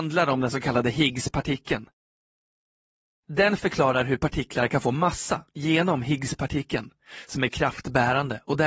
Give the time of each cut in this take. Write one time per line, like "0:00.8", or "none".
none

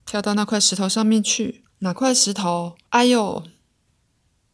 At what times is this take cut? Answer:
0:01.7
0:02.9

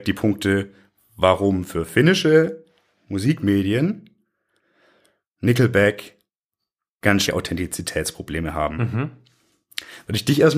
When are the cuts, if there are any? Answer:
0:07.3

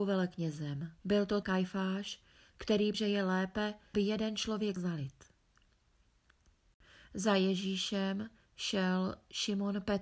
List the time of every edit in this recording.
0:01.0
0:01.4
0:02.9
0:03.9
0:04.8

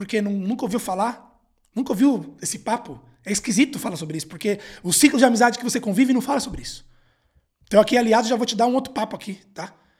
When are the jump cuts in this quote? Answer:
none

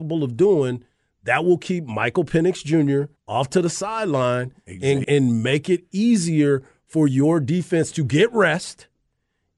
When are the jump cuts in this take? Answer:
0:03.2
0:05.0

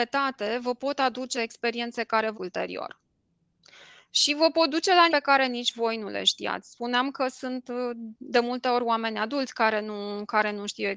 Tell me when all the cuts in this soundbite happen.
0:01.3
0:02.3
0:05.1

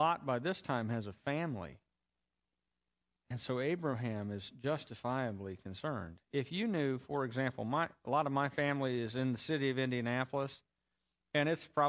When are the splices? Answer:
0:02.2

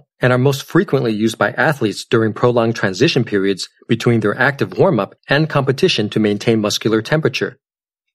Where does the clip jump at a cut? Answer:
0:05.2

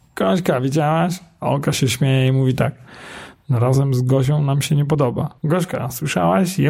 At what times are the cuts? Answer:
0:05.4

